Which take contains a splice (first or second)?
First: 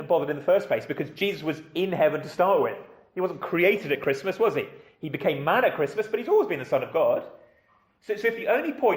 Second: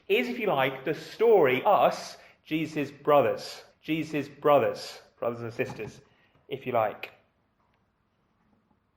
second